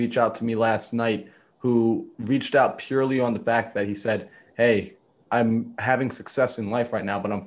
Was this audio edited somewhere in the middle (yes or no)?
no